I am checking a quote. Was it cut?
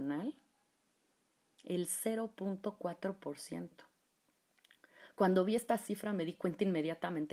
no; 0 cuts

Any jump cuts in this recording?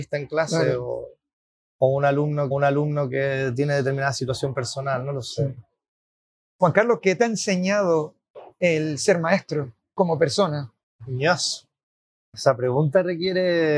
yes; 2 cuts; at 2.5 s, 10.8 s

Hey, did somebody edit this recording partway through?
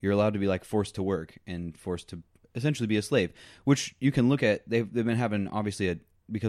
no; 0 cuts

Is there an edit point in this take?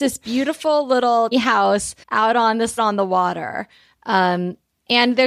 yes; 3 cuts; at 1.3 s, 2.0 s, 2.8 s

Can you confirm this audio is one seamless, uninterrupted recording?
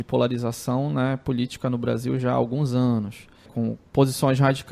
no; 1 cut; at 3.5 s

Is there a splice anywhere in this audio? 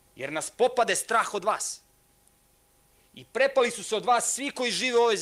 no; 0 cuts

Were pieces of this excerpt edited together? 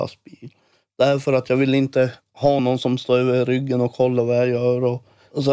no; 0 cuts

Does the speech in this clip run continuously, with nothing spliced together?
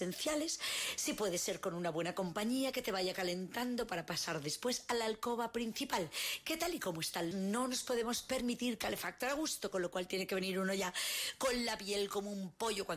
no; 1 cut; at 7.3 s

